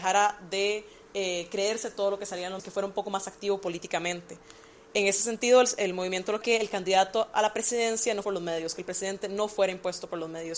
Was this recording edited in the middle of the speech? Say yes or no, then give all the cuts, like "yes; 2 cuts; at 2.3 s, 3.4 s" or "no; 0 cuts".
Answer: yes; 3 cuts; at 2.6 s, 6.4 s, 8.2 s